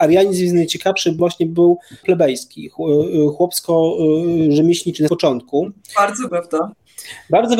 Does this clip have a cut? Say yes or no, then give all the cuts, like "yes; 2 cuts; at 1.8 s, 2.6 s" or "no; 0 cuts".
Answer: yes; 4 cuts; at 1.2 s, 2.0 s, 5.1 s, 6.3 s